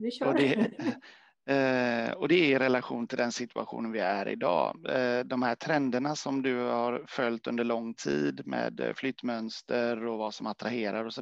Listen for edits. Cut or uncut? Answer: uncut